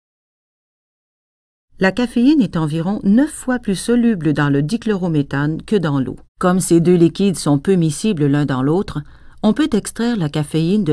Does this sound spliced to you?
yes; 1 cut; at 6.2 s

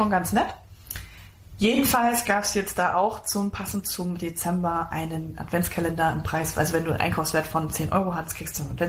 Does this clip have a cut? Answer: no; 0 cuts

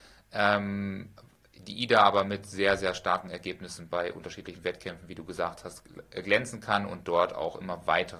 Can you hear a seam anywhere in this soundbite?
no; 0 cuts

